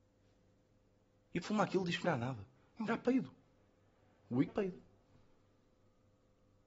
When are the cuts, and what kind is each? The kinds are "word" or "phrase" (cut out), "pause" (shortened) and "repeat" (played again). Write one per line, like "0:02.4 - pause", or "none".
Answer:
0:01.4 - word
0:02.0 - word
0:02.9 - word
0:04.5 - word